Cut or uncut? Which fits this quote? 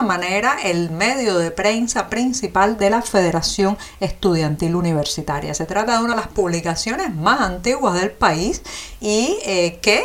uncut